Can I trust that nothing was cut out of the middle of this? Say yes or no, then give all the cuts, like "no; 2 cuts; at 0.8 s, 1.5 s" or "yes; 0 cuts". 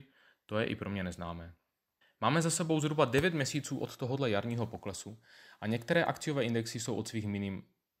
yes; 0 cuts